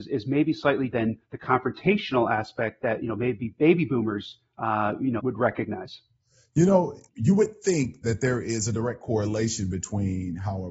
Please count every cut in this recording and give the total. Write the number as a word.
five